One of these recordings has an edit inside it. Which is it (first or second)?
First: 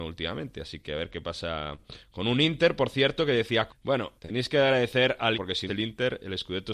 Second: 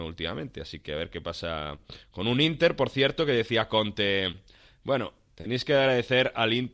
first